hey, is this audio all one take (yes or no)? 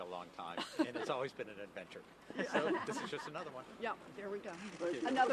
yes